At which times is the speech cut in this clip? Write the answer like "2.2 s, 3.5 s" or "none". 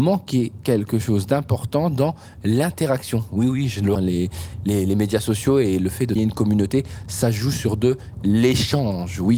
4.0 s, 6.2 s